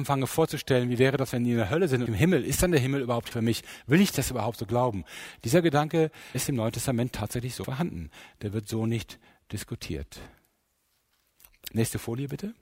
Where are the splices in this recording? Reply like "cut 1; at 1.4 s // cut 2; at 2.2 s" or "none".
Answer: cut 1; at 2.1 s // cut 2; at 3.3 s // cut 3; at 6.3 s // cut 4; at 7.6 s